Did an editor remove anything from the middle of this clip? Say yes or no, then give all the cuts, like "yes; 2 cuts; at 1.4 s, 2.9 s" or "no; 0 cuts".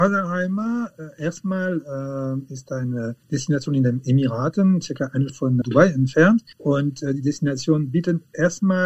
yes; 4 cuts; at 3.2 s, 5.3 s, 5.6 s, 6.5 s